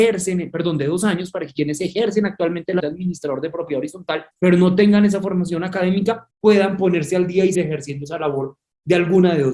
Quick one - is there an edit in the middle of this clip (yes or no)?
yes